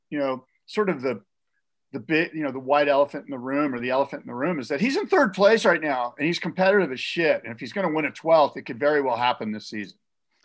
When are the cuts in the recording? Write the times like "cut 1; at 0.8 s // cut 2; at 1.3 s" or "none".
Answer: none